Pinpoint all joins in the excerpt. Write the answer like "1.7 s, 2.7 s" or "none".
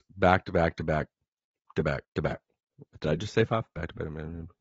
2.0 s, 3.0 s